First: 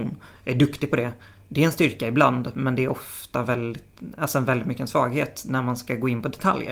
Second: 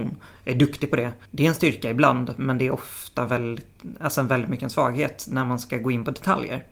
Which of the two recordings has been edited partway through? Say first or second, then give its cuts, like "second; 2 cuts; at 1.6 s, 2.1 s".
second; 1 cut; at 1.2 s